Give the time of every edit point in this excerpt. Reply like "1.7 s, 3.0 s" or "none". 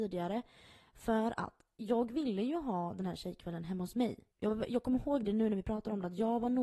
4.3 s